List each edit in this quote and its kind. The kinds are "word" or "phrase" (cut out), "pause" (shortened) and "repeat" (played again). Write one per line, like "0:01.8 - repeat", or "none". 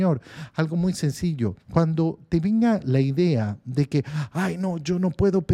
0:01.6 - pause